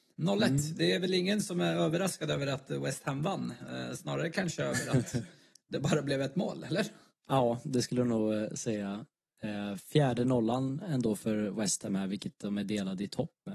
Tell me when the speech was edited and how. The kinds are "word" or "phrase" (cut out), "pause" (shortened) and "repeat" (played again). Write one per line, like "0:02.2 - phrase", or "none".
none